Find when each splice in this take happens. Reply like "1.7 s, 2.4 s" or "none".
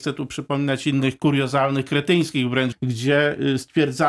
2.7 s